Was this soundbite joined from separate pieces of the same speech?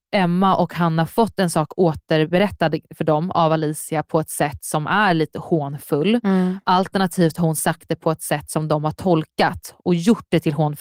no; 0 cuts

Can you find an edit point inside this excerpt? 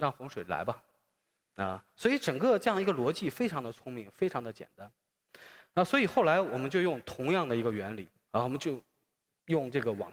no; 0 cuts

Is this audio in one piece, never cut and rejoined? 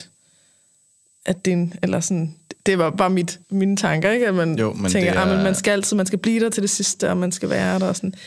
no; 1 cut; at 3.4 s

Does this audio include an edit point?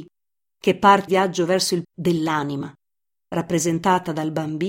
yes; 2 cuts; at 1.1 s, 1.8 s

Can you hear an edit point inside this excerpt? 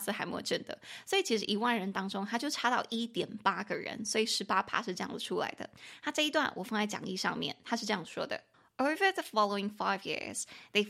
yes; 1 cut; at 8.5 s

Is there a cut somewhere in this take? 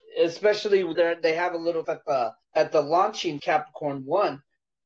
yes; 4 cuts; at 0.9 s, 1.8 s, 2.4 s, 3.4 s

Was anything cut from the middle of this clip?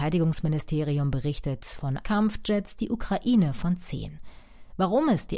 yes; 1 cut; at 2.0 s

